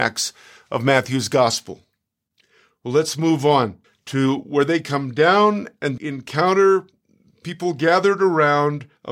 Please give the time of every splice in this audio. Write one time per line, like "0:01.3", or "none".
0:03.8
0:06.0